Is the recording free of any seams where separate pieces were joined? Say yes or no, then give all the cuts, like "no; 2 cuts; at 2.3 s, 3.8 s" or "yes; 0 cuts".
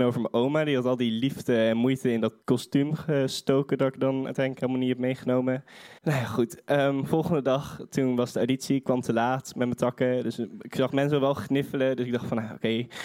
no; 2 cuts; at 2.4 s, 6.0 s